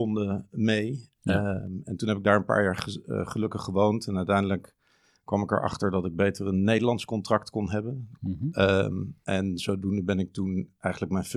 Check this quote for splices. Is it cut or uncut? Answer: uncut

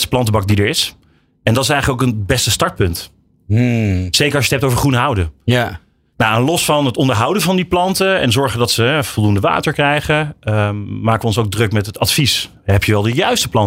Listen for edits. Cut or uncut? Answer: uncut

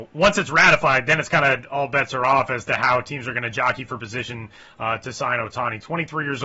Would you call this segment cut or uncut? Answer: uncut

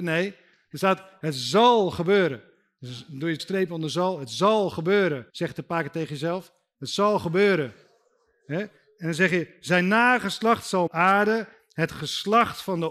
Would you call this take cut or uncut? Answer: cut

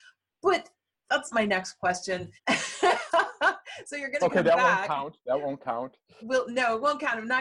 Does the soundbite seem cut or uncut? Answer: cut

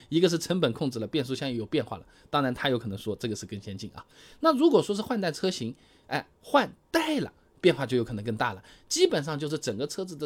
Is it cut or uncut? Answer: uncut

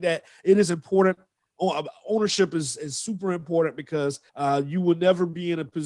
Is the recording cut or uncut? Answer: cut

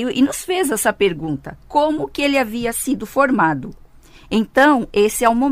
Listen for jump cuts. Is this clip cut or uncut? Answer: cut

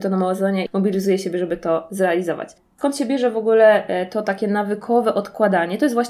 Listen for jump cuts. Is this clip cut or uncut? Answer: uncut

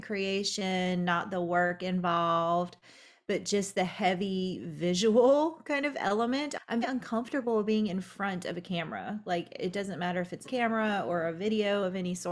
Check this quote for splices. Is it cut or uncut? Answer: cut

